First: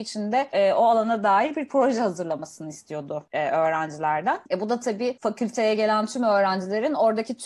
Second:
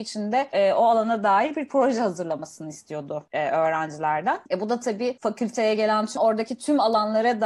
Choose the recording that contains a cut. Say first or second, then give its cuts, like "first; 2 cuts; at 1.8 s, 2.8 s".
second; 1 cut; at 6.2 s